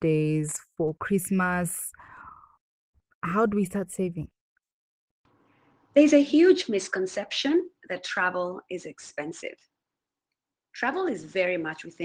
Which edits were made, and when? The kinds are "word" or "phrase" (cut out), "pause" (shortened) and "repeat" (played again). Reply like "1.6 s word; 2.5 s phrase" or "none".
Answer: none